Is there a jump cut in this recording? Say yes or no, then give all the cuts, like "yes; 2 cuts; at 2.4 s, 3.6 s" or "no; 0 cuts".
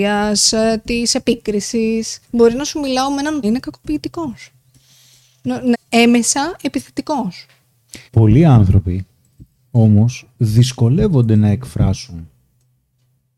yes; 4 cuts; at 2.2 s, 3.4 s, 5.7 s, 8.1 s